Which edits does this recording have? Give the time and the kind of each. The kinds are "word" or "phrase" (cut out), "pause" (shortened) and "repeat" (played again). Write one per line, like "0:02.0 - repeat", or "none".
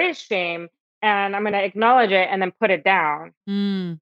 none